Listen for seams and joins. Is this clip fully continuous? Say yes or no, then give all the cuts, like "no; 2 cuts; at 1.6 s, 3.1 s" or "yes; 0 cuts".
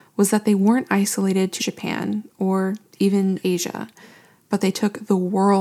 no; 2 cuts; at 1.6 s, 3.4 s